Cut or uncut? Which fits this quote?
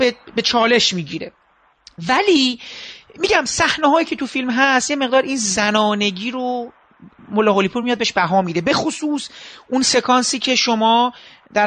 uncut